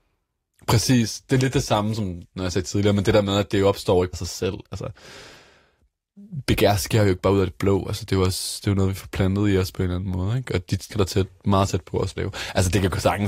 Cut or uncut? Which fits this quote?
cut